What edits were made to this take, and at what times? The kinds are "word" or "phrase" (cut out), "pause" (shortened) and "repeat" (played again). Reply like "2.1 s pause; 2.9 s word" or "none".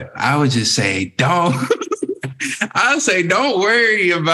none